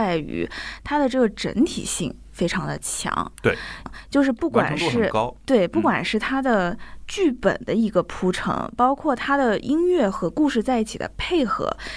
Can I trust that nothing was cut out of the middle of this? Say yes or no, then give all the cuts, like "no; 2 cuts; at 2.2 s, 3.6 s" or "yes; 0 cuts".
no; 1 cut; at 3.9 s